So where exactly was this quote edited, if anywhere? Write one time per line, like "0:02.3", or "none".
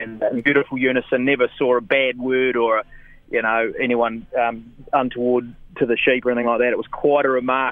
none